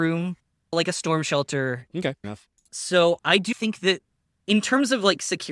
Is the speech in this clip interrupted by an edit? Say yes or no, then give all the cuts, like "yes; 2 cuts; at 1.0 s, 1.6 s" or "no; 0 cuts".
yes; 3 cuts; at 2.2 s, 3.2 s, 3.5 s